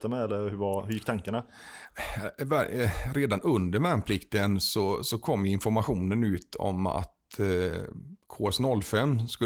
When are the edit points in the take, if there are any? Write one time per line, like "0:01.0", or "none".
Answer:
none